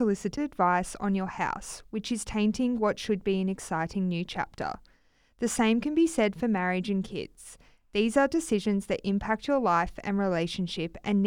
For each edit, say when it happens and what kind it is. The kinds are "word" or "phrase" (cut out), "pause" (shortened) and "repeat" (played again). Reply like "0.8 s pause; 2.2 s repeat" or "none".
none